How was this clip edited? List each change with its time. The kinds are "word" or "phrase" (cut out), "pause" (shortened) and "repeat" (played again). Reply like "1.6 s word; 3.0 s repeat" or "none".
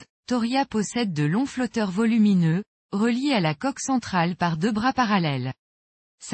none